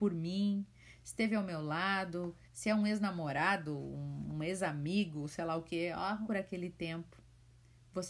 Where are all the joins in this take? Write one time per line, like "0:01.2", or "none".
0:02.5
0:06.3